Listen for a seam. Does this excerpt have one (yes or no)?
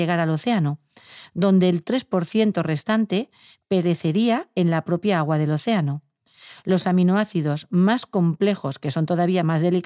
no